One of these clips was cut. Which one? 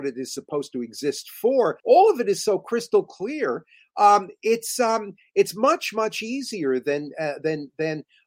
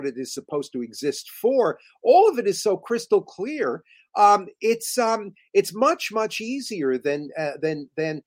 first; 1 cut; at 1.8 s

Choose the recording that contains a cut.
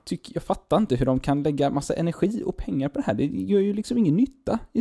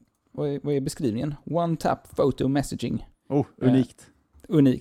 second; 1 cut; at 3.1 s

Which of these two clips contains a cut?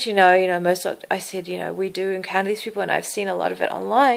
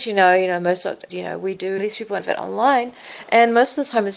second; 3 cuts; at 1.1 s, 1.8 s, 2.2 s

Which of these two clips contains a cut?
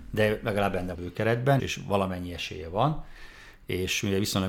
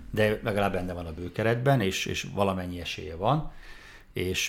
first; 2 cuts; at 0.9 s, 1.6 s

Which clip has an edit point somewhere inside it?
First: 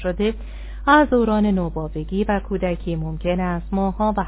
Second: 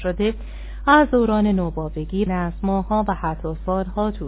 second; 1 cut; at 2.3 s

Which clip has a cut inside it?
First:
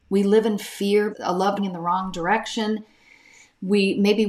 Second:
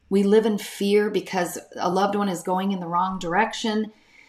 first; 2 cuts; at 1.1 s, 1.6 s

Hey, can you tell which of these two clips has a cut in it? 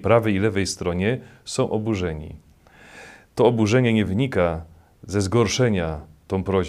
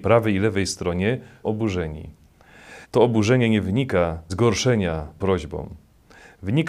second; 4 cuts; at 1.4 s, 2.8 s, 4.3 s, 5.2 s

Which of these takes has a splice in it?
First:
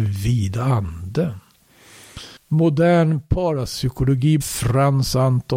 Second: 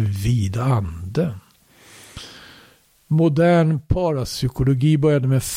first; 2 cuts; at 2.4 s, 4.4 s

